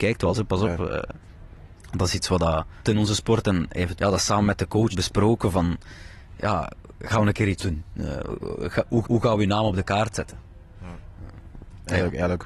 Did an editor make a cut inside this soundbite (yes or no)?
yes